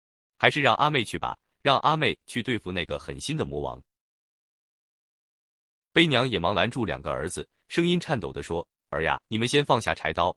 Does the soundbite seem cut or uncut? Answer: cut